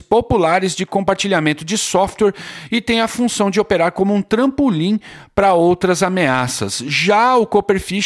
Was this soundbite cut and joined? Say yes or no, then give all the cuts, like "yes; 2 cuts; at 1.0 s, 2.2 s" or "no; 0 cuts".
no; 0 cuts